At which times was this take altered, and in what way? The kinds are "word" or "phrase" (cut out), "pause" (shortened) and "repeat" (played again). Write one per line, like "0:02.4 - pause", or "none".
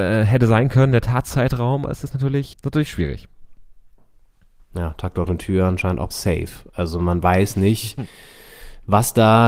0:01.8 - word
0:02.5 - word
0:06.1 - word